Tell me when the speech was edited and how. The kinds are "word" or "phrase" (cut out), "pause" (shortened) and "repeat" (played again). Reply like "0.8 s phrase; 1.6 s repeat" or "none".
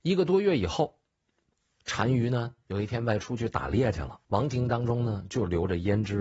4.2 s pause